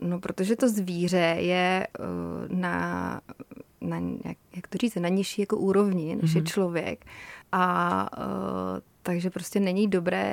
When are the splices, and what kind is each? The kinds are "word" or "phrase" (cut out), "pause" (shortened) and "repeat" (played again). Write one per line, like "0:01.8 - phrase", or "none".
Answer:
0:01.9 - pause
0:07.4 - pause